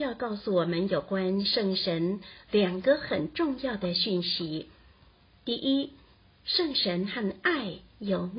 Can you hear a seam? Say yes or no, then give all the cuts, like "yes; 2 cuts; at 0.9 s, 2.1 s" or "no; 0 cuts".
no; 0 cuts